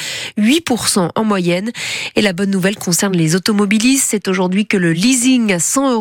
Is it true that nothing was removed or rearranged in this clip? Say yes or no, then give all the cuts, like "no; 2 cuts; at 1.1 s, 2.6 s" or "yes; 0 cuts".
yes; 0 cuts